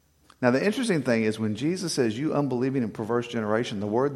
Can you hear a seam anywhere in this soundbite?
no; 0 cuts

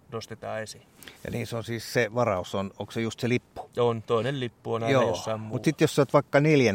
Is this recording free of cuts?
no; 1 cut; at 1.2 s

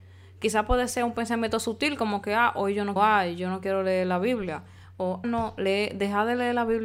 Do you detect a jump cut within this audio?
yes; 2 cuts; at 3.0 s, 5.2 s

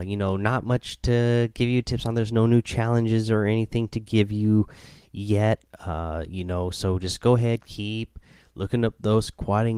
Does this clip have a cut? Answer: no; 0 cuts

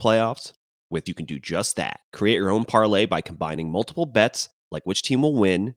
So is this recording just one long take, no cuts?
no; 2 cuts; at 1.1 s, 2.0 s

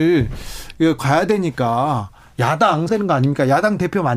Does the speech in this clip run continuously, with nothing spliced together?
no; 2 cuts; at 1.0 s, 2.9 s

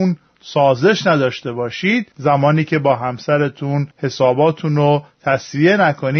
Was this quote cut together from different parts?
yes; 2 cuts; at 2.1 s, 3.9 s

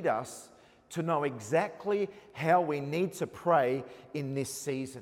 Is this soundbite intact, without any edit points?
yes; 0 cuts

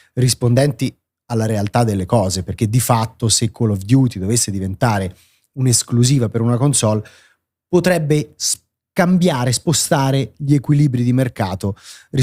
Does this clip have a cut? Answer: no; 0 cuts

